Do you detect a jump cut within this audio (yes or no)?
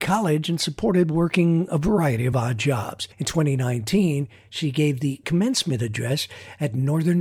no